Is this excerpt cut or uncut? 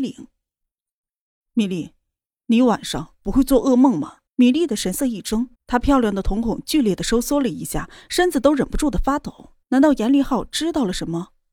cut